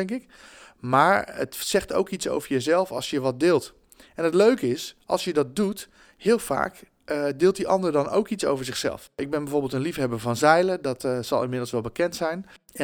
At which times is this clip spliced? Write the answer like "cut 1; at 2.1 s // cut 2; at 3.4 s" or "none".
none

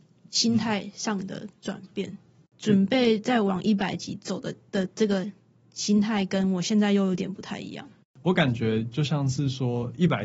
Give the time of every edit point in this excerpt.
none

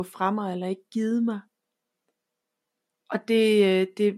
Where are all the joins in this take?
none

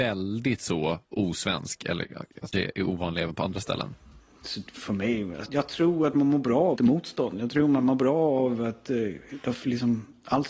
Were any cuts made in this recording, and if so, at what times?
cut 1; at 2.5 s // cut 2; at 5.5 s // cut 3; at 6.8 s

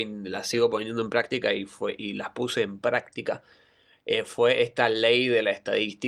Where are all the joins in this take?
none

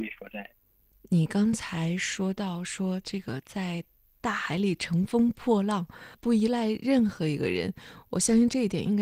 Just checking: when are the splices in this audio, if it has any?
cut 1; at 6.1 s

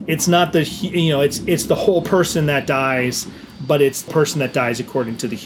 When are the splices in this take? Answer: cut 1; at 4.1 s

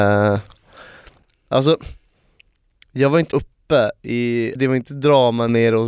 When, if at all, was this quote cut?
cut 1; at 3.3 s // cut 2; at 4.5 s

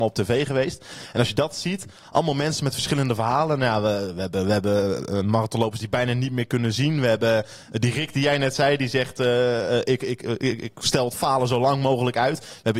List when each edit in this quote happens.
none

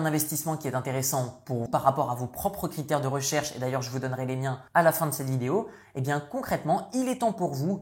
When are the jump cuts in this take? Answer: cut 1; at 1.7 s // cut 2; at 4.7 s

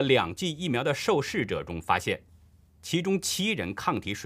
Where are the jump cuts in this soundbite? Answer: none

